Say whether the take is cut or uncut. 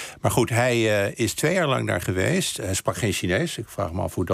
uncut